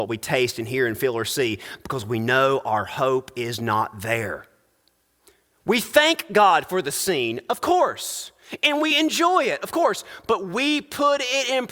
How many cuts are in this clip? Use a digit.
0